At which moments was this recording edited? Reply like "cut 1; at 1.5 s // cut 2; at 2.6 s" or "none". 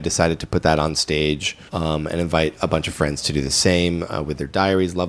cut 1; at 1.7 s